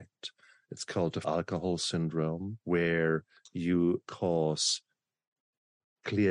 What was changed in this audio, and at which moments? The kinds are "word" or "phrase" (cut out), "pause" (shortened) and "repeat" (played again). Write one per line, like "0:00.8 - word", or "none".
0:01.2 - word
0:02.6 - pause
0:04.0 - word